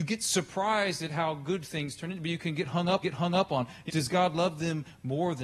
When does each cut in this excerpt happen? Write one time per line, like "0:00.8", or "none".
0:03.0
0:03.9